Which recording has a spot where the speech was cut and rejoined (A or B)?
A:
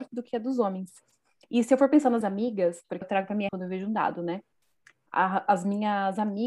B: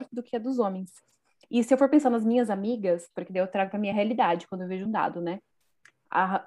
A